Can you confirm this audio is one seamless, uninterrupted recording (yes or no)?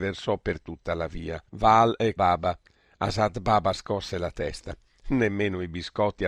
no